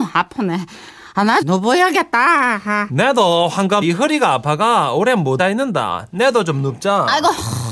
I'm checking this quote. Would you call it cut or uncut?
cut